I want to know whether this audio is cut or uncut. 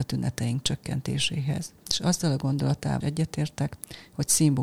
cut